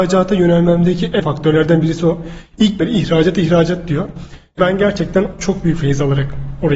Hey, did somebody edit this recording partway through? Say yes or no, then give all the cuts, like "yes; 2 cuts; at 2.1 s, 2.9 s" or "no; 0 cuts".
yes; 4 cuts; at 1.2 s, 2.8 s, 4.6 s, 5.3 s